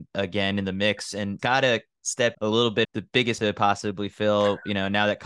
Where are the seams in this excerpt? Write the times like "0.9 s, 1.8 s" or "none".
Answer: 1.4 s, 2.3 s, 2.8 s, 3.4 s